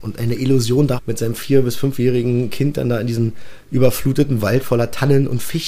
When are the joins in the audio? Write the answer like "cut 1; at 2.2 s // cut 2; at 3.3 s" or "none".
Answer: cut 1; at 1.0 s